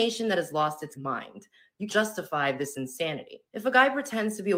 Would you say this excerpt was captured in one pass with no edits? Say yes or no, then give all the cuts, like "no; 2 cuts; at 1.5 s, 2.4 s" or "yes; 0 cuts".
no; 3 cuts; at 0.9 s, 1.9 s, 3.5 s